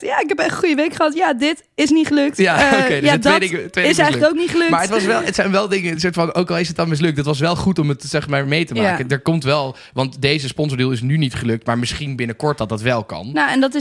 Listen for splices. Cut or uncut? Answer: uncut